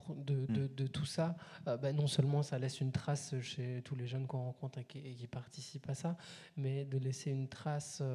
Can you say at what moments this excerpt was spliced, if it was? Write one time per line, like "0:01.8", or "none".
none